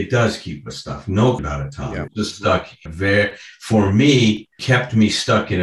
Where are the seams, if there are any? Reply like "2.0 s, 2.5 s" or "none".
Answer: 1.4 s, 2.1 s, 2.9 s, 4.6 s